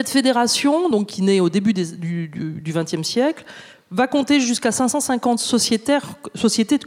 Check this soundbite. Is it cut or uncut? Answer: uncut